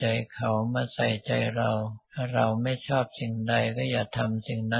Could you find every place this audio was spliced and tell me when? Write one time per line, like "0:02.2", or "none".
0:02.1